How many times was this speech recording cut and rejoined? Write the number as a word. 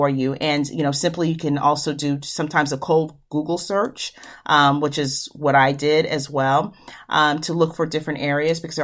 zero